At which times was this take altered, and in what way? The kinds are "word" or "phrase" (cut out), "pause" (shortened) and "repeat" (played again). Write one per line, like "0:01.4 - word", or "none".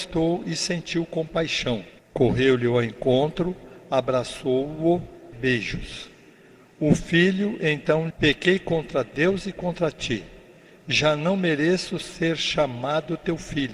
0:02.0 - pause
0:05.3 - phrase
0:08.1 - phrase

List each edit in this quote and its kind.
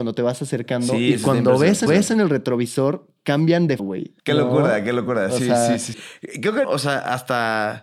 0:01.9 - repeat
0:03.8 - word
0:04.2 - pause
0:05.9 - word
0:06.6 - word

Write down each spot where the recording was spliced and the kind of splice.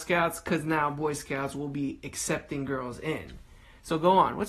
none

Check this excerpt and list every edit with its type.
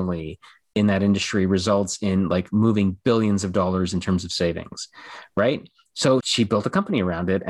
0:06.2 - word

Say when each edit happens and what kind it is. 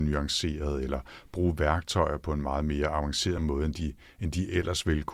none

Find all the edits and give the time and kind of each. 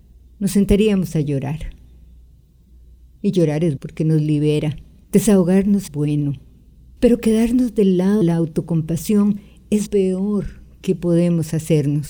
0:03.8 - word
0:05.9 - word
0:08.2 - word
0:09.9 - word

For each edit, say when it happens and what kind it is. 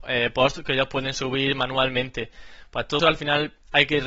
0:03.0 - word

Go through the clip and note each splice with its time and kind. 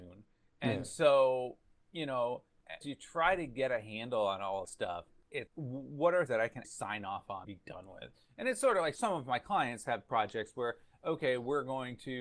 0:02.8 - word
0:04.6 - word
0:05.5 - word
0:06.3 - word
0:06.6 - word
0:07.4 - word
0:09.0 - word

